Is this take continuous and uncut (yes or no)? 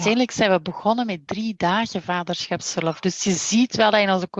yes